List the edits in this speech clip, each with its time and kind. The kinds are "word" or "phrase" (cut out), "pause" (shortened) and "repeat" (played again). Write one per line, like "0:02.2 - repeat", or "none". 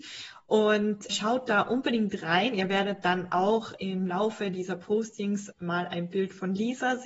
0:01.1 - word
0:05.5 - word